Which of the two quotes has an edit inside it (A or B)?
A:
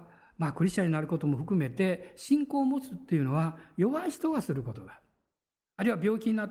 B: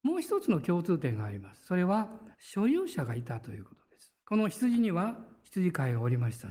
B